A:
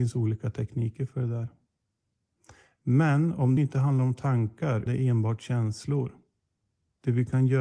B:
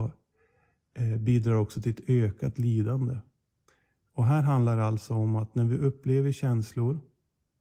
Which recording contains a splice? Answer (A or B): A